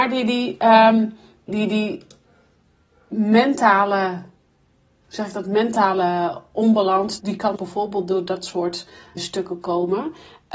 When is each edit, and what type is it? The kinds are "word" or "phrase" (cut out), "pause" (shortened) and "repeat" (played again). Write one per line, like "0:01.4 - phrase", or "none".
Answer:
0:01.5 - word
0:07.2 - word
0:07.6 - word
0:09.2 - word